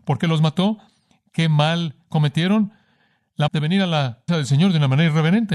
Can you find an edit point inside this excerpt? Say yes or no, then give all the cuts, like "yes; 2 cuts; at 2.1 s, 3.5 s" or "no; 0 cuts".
yes; 2 cuts; at 3.5 s, 4.3 s